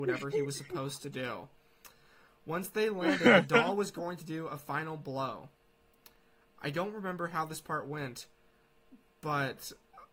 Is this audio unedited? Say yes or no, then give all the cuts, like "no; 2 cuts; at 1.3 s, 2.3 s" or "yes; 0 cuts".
yes; 0 cuts